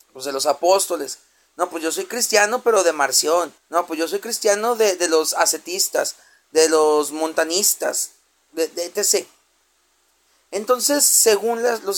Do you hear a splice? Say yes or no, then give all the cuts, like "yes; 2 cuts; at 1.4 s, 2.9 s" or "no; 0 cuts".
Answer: yes; 1 cut; at 3.6 s